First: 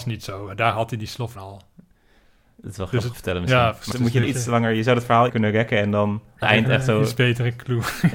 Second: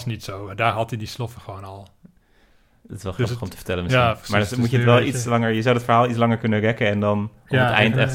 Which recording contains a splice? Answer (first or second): first